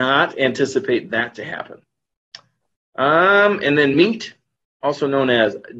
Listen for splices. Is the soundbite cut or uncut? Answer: uncut